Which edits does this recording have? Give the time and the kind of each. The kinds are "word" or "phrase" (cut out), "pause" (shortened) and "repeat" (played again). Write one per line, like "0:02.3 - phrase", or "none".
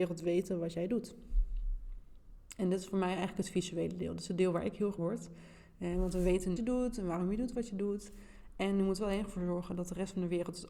0:05.0 - phrase
0:06.6 - phrase